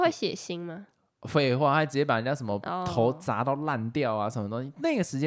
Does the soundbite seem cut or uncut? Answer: uncut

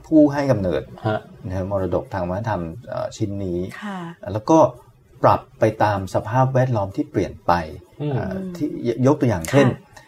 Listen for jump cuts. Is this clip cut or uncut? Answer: uncut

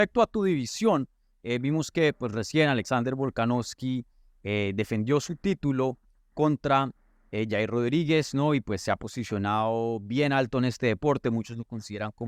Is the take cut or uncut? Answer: uncut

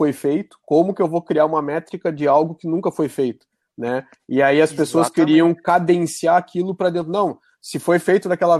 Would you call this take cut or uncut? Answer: uncut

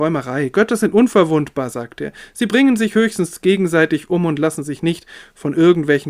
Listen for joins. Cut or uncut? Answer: uncut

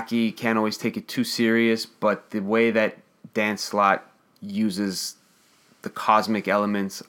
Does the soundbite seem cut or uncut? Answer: uncut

